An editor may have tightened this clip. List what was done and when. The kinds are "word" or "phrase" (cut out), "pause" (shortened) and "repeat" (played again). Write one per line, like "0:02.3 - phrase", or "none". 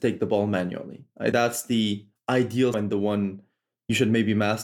0:01.3 - word
0:02.7 - word